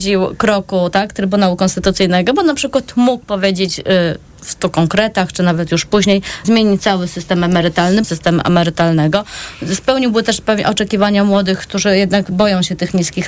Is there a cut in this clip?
yes; 2 cuts; at 6.4 s, 8.0 s

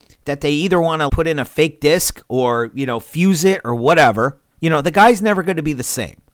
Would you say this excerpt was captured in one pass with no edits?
no; 2 cuts; at 1.1 s, 4.5 s

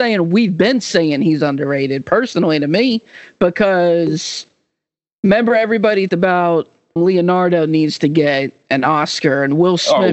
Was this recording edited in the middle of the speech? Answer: yes; 2 cuts; at 6.1 s, 7.0 s

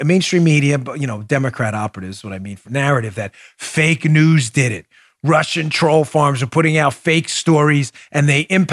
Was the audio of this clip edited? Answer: yes; 1 cut; at 2.6 s

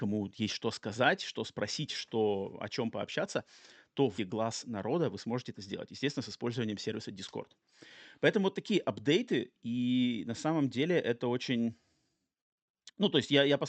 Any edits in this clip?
yes; 1 cut; at 4.2 s

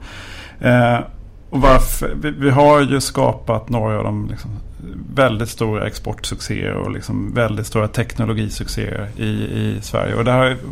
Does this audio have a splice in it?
no; 0 cuts

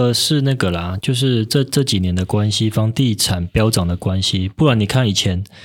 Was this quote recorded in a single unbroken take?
yes; 0 cuts

